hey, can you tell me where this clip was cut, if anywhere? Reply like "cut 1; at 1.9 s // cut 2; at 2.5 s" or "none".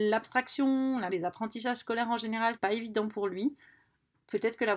cut 1; at 1.1 s // cut 2; at 2.5 s